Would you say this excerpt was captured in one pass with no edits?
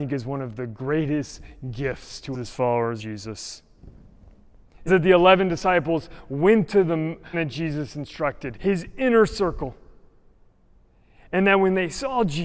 no; 5 cuts; at 2.3 s, 3.0 s, 4.9 s, 7.3 s, 8.5 s

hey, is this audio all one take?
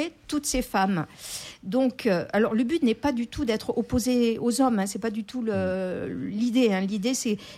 yes; 0 cuts

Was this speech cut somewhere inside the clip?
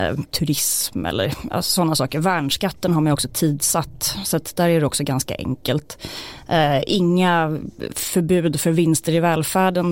no; 0 cuts

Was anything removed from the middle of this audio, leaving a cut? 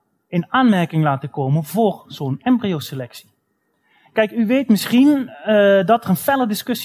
no; 0 cuts

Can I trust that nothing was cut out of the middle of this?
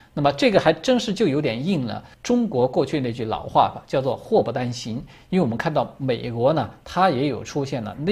no; 1 cut; at 2.1 s

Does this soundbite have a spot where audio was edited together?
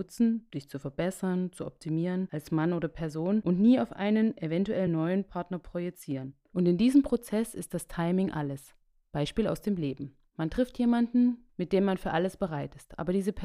no; 0 cuts

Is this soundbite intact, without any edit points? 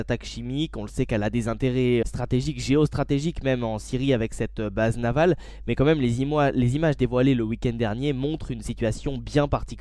no; 1 cut; at 2.0 s

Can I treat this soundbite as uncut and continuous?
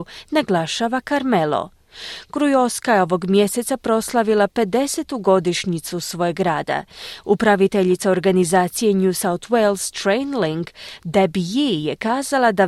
yes; 0 cuts

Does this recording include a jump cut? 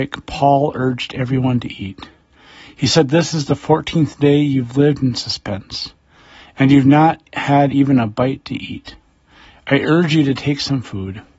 no; 0 cuts

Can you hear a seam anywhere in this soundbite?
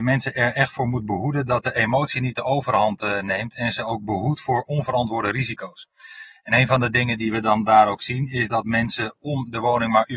no; 0 cuts

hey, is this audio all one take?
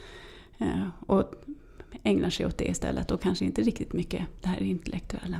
yes; 0 cuts

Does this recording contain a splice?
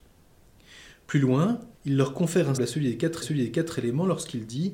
yes; 3 cuts; at 1.7 s, 2.6 s, 3.2 s

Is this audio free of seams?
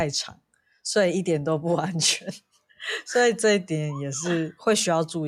yes; 0 cuts

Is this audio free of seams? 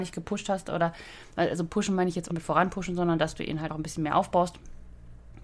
no; 2 cuts; at 2.3 s, 3.7 s

